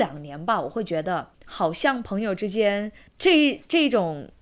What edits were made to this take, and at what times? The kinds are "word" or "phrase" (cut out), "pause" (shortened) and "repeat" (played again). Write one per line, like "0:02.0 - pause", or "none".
0:01.3 - pause
0:03.1 - pause